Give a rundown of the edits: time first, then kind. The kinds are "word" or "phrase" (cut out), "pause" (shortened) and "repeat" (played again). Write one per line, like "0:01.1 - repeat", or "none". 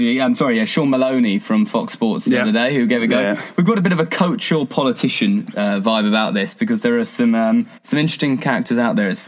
0:07.8 - pause